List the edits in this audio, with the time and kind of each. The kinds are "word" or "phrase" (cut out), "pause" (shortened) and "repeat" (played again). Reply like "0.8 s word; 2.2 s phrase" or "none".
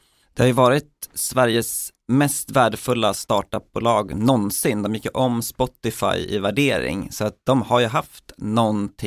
none